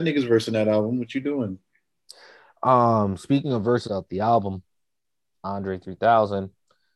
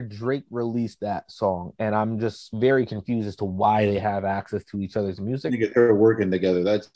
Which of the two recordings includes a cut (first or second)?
first